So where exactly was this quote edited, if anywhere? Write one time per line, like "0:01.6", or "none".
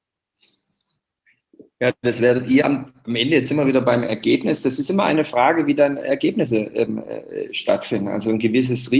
none